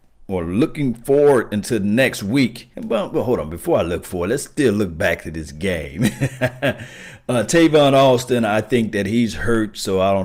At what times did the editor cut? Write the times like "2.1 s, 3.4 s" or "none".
2.7 s